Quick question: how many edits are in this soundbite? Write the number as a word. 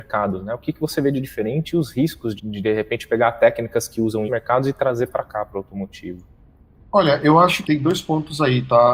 three